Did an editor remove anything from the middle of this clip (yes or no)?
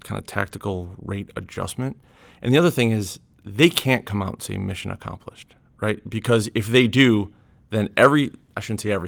no